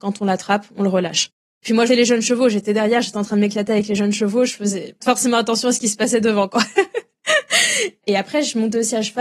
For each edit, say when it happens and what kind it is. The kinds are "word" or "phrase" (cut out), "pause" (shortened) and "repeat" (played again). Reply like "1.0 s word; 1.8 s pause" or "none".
1.9 s word; 5.0 s word